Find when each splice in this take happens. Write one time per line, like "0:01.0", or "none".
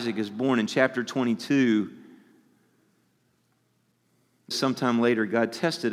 0:04.5

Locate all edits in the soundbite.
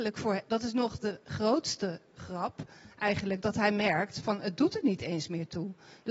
none

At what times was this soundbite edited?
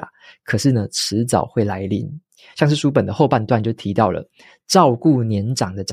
none

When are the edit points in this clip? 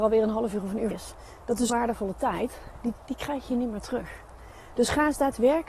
0:00.9
0:01.7
0:03.0

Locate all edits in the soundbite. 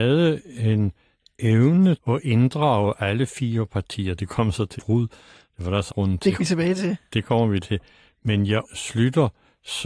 0:02.0
0:04.8
0:05.9
0:06.4
0:07.6
0:08.6

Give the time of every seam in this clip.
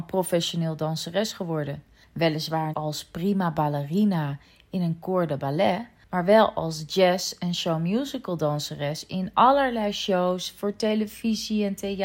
0:02.7

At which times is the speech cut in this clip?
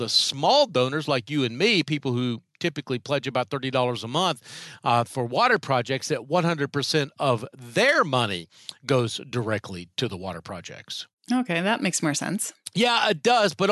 none

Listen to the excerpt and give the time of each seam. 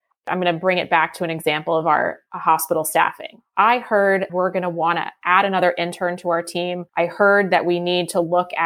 0:04.3
0:06.9

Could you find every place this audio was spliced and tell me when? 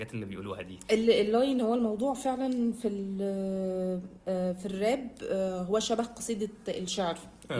none

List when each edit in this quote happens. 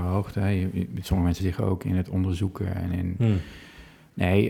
0:01.4

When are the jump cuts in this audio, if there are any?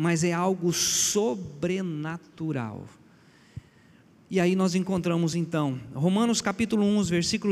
none

